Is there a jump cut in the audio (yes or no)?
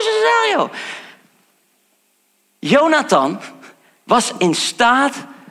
no